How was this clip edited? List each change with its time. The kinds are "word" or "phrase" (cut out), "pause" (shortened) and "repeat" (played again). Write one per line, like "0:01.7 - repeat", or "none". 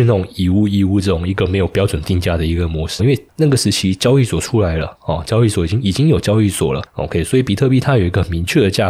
0:03.0 - phrase